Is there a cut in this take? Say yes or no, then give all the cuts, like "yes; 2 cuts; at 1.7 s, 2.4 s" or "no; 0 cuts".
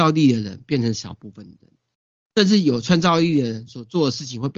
no; 0 cuts